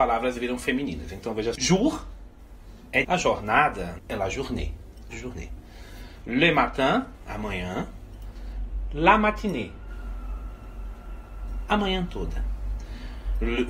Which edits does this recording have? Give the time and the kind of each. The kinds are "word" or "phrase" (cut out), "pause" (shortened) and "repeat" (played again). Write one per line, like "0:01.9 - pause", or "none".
0:01.6 - word
0:03.0 - word
0:04.0 - phrase
0:05.1 - word